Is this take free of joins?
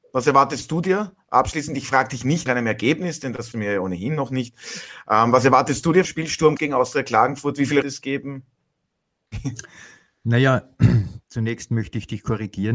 no; 6 cuts; at 2.5 s, 3.5 s, 6.0 s, 6.6 s, 7.8 s, 11.2 s

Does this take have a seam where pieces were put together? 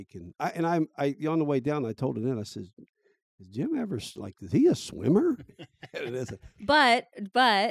no; 0 cuts

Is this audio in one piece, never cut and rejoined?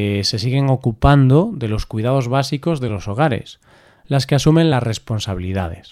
yes; 0 cuts

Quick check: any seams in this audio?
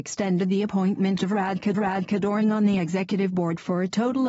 yes; 1 cut; at 1.7 s

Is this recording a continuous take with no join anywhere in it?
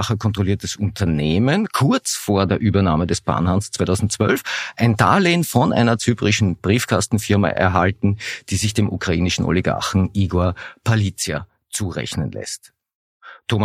yes; 0 cuts

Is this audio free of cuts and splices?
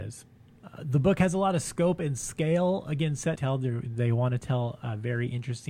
no; 1 cut; at 3.4 s

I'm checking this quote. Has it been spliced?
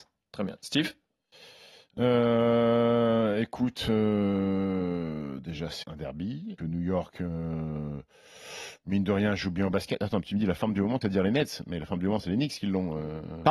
yes; 3 cuts; at 5.8 s, 6.6 s, 11.0 s

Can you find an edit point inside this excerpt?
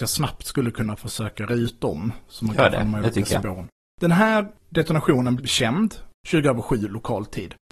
yes; 2 cuts; at 1.5 s, 5.4 s

